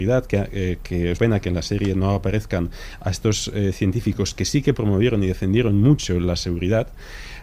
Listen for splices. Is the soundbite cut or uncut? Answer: cut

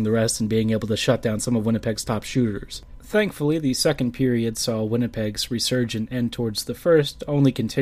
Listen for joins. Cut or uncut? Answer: uncut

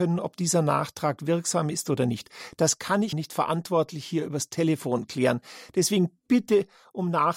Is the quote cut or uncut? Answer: cut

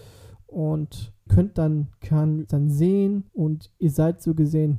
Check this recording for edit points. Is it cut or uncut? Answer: cut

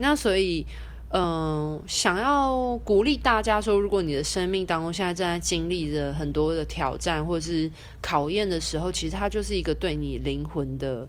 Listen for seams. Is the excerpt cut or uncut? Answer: uncut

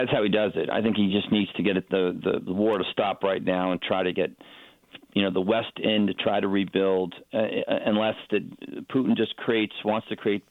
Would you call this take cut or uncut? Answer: uncut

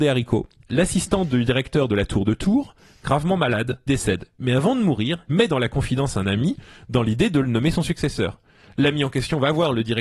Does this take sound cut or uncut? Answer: cut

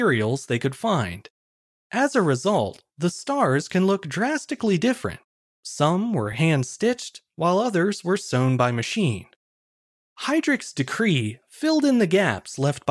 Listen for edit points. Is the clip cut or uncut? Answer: uncut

